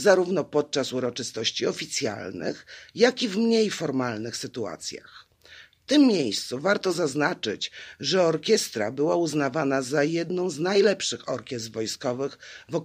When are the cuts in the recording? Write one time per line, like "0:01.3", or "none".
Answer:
none

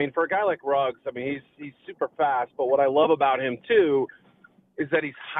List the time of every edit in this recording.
none

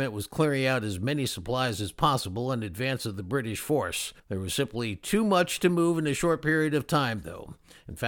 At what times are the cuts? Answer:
0:04.2

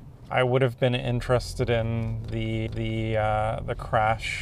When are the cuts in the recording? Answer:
0:02.7

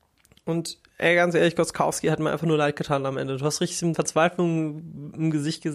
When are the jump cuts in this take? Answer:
0:03.9

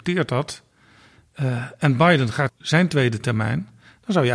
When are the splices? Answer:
0:02.5

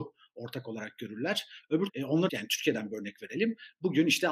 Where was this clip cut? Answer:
0:01.9
0:02.3

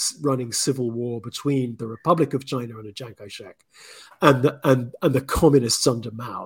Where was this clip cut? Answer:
none

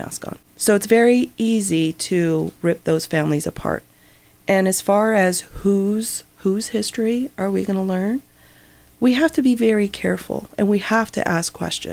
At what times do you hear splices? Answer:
0:06.3

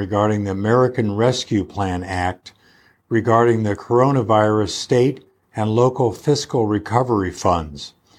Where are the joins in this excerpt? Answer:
none

